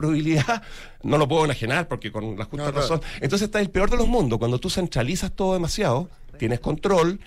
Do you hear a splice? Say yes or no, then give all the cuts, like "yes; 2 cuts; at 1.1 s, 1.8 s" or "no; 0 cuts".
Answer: no; 0 cuts